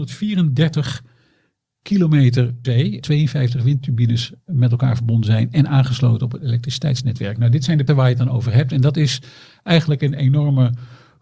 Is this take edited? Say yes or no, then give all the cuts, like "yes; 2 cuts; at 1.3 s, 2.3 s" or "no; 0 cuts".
yes; 3 cuts; at 2.6 s, 3.0 s, 7.9 s